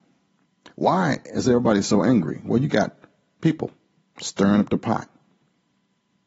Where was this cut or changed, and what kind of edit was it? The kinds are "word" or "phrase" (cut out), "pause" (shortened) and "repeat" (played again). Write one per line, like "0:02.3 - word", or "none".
0:04.0 - pause